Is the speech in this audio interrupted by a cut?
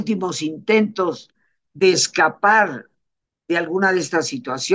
no; 0 cuts

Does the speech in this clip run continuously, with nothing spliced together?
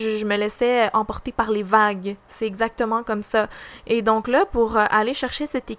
yes; 0 cuts

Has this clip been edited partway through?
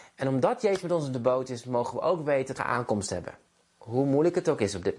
yes; 1 cut; at 2.6 s

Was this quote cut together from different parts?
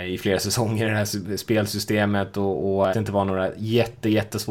yes; 1 cut; at 2.9 s

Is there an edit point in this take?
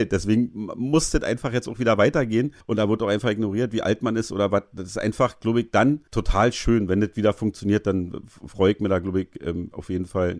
yes; 1 cut; at 2.6 s

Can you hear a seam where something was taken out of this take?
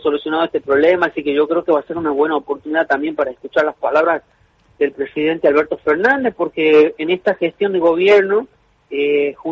no; 0 cuts

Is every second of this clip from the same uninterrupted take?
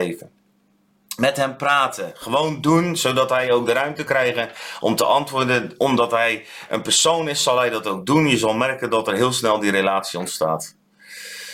no; 1 cut; at 4.1 s

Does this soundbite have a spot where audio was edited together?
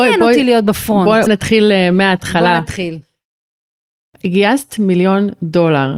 yes; 1 cut; at 1.3 s

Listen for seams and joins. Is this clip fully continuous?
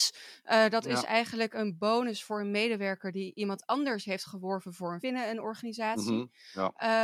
no; 1 cut; at 5.0 s

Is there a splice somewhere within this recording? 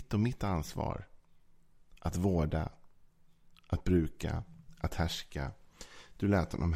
no; 0 cuts

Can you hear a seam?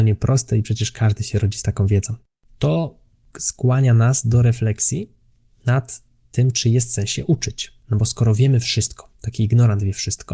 no; 0 cuts

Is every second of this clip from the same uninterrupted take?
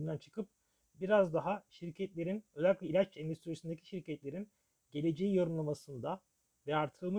yes; 0 cuts

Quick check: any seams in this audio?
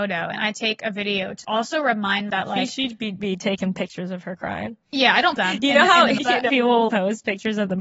yes; 7 cuts; at 1.4 s, 2.3 s, 3.2 s, 5.4 s, 6.2 s, 6.5 s, 6.9 s

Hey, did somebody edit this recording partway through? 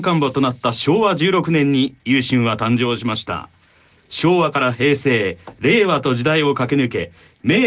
no; 0 cuts

